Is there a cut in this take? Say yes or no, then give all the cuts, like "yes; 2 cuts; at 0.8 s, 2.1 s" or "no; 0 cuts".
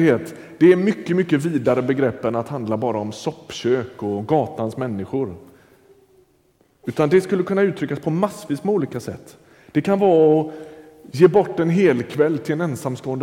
no; 0 cuts